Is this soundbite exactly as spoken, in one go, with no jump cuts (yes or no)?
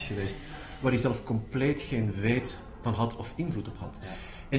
yes